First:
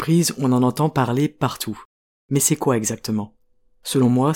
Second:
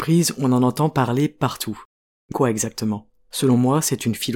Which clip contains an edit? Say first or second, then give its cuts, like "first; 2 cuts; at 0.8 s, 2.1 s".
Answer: second; 2 cuts; at 2.3 s, 3.2 s